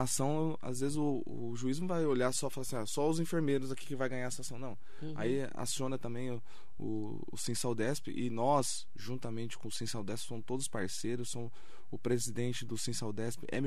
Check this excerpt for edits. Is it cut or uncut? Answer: uncut